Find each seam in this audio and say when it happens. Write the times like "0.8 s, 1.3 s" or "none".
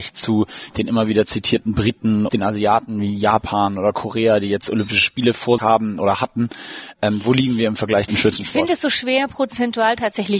2.3 s, 5.6 s, 8.1 s